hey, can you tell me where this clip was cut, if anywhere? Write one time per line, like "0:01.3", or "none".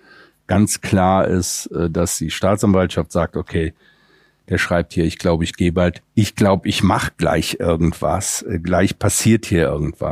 none